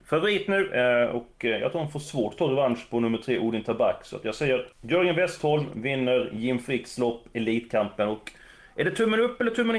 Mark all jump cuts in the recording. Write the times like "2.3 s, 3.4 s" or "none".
4.7 s